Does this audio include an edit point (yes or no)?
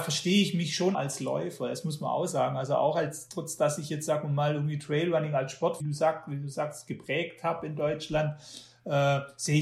yes